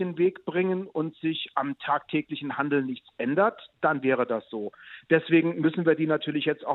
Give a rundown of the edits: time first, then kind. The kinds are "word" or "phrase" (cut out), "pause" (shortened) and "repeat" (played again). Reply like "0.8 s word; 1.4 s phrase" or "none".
none

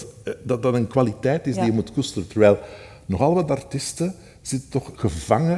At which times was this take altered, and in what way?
none

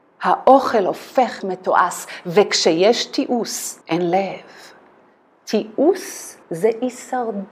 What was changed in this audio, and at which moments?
1.4 s word; 3.8 s pause; 6.4 s pause

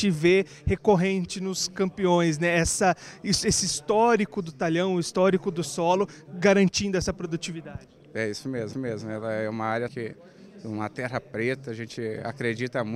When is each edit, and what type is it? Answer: 8.7 s repeat; 9.9 s word

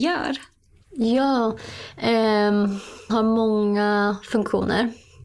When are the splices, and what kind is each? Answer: 3.1 s word

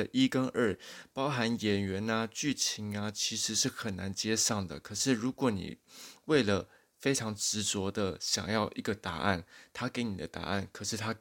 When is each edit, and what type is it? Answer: none

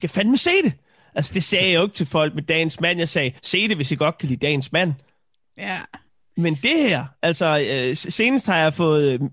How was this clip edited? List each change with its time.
3.4 s pause; 6.1 s pause

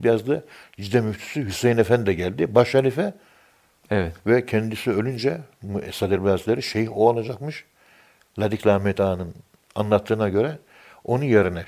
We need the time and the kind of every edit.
none

